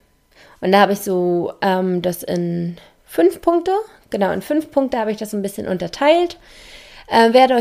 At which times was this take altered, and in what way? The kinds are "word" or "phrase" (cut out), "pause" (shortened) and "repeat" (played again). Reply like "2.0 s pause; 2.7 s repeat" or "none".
none

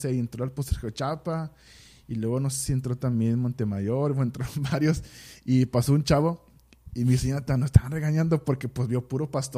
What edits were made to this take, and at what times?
none

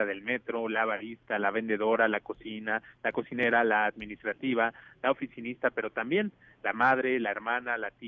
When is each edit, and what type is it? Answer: none

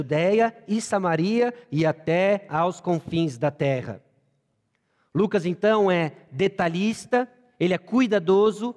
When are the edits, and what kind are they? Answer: none

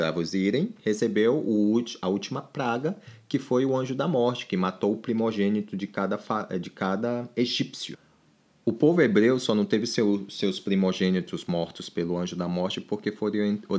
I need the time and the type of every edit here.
none

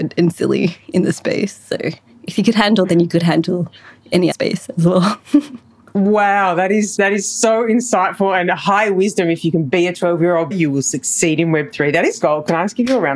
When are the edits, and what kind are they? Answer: 2.9 s word; 4.3 s word; 7.0 s word; 10.5 s word; 12.2 s word

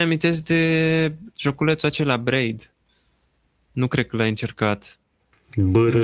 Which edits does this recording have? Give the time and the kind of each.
1.3 s word

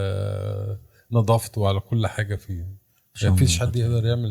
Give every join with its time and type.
none

